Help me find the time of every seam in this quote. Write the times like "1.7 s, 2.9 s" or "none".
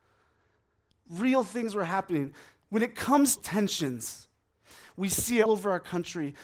3.4 s, 5.5 s